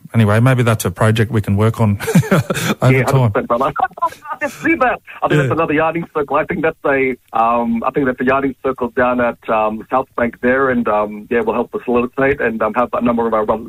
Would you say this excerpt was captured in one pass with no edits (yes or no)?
no